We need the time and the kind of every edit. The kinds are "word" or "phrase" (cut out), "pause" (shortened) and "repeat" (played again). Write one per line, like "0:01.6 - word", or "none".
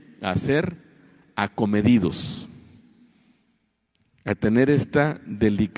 none

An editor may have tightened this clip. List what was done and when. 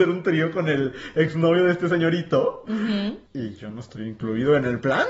0:03.3 - pause

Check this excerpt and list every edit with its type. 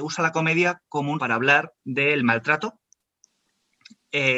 0:01.2 - word
0:01.8 - pause

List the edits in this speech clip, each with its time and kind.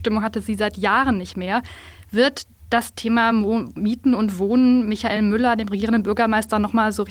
none

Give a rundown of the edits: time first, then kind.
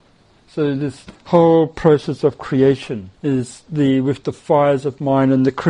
0:03.1 - pause

